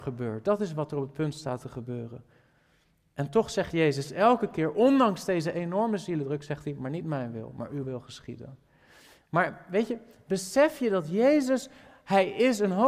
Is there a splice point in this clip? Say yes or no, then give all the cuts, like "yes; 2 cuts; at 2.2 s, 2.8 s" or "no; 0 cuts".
no; 0 cuts